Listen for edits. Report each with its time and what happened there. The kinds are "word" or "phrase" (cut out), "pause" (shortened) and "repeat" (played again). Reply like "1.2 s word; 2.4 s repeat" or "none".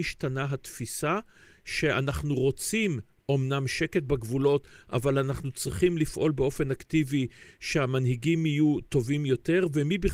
none